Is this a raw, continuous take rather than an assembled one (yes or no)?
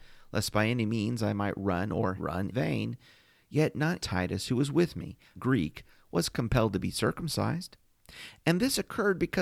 no